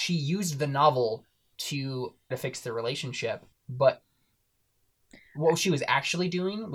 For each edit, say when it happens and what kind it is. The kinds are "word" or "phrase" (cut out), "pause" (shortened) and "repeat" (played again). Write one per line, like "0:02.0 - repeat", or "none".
0:02.3 - word
0:03.5 - pause